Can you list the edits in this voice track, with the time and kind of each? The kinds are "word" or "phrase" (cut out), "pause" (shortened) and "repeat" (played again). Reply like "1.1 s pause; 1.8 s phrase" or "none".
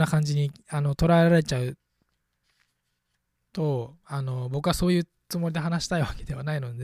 none

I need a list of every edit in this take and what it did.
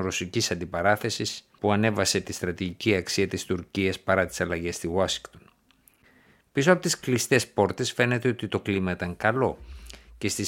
none

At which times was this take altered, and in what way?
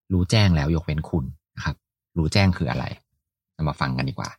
none

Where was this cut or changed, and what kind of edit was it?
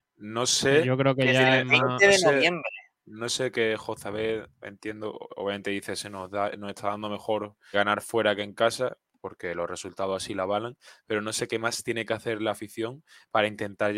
7.7 s word

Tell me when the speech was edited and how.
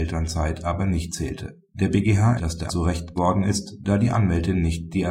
1.7 s pause; 2.4 s word; 2.7 s word; 3.2 s word

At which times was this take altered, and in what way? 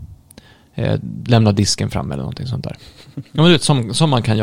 none

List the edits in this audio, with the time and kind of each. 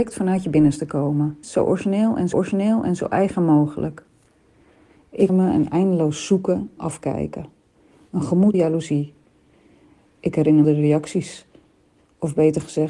1.4 s word; 2.3 s repeat; 5.3 s word; 6.8 s word; 8.5 s word; 10.6 s phrase

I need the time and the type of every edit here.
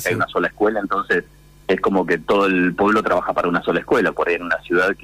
none

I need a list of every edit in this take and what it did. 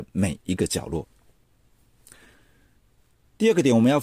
none

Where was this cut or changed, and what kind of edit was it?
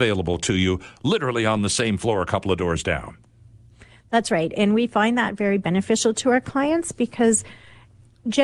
none

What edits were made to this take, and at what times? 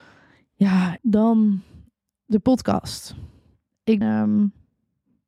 1.0 s word; 4.0 s word

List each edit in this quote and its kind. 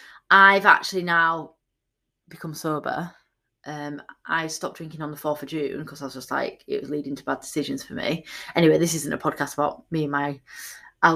none

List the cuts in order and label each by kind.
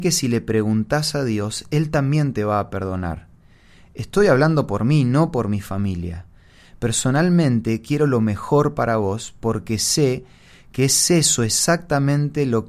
none

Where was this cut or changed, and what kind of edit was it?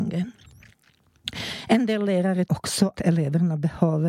2.5 s word; 2.9 s word

